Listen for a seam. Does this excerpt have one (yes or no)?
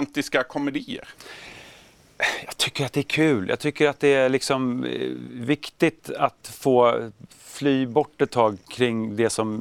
no